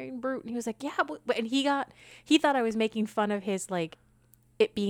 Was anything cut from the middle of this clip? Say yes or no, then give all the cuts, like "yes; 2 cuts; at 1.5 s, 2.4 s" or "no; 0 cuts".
no; 0 cuts